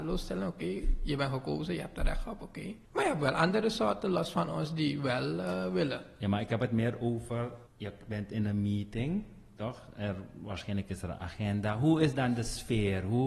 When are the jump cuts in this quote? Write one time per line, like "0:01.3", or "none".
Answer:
0:02.8
0:07.7